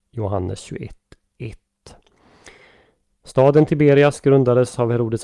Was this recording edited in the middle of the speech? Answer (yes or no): no